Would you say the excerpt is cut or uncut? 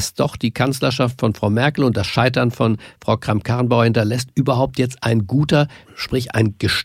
uncut